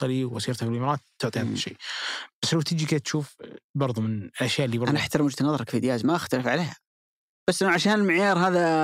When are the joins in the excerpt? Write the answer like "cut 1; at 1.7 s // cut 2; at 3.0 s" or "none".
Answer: none